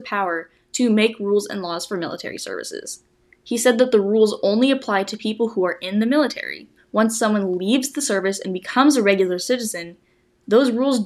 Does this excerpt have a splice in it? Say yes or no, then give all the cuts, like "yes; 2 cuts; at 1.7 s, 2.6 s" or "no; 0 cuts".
yes; 1 cut; at 6.8 s